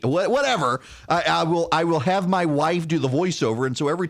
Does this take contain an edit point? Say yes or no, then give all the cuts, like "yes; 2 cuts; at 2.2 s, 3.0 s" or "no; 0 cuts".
no; 0 cuts